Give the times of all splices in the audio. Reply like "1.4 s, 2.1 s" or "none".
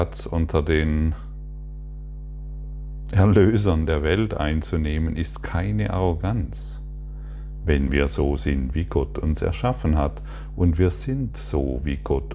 none